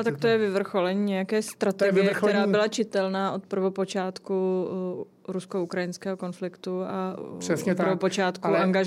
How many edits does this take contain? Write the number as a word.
zero